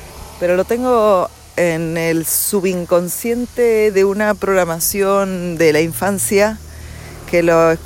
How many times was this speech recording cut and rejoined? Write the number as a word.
zero